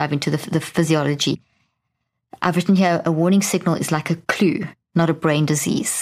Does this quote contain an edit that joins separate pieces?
no; 0 cuts

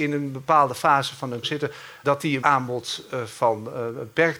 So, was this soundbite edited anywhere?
yes; 3 cuts; at 1.4 s, 2.0 s, 2.4 s

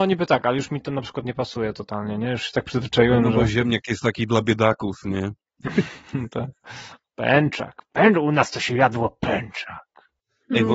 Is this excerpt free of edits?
yes; 0 cuts

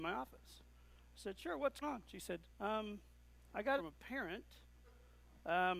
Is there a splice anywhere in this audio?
yes; 3 cuts; at 1.8 s, 2.5 s, 3.8 s

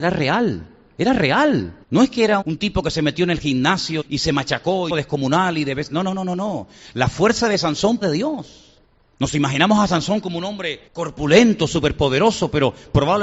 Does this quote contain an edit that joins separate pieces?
yes; 7 cuts; at 1.8 s, 2.4 s, 4.0 s, 4.9 s, 8.0 s, 8.9 s, 10.9 s

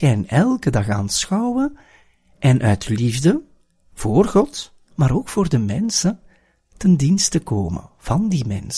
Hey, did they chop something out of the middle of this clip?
no; 0 cuts

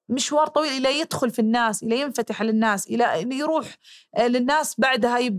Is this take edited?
no; 0 cuts

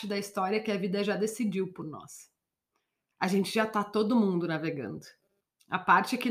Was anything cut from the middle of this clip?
no; 0 cuts

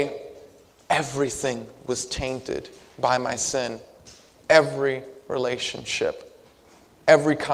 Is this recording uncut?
yes; 0 cuts

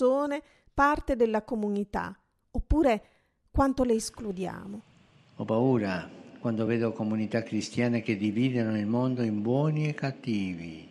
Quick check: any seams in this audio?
no; 0 cuts

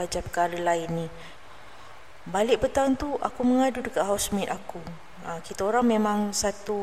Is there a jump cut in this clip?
no; 0 cuts

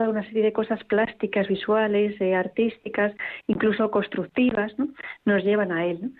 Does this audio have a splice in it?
no; 0 cuts

